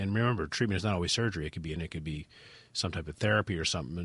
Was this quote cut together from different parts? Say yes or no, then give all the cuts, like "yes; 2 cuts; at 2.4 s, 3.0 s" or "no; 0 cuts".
yes; 1 cut; at 1.8 s